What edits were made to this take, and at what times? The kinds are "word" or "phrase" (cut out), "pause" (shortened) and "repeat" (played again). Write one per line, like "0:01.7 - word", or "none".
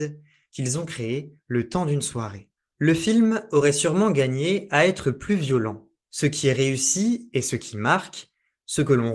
0:02.6 - pause